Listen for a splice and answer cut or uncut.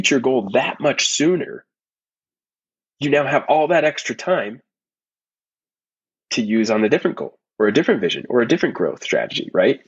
uncut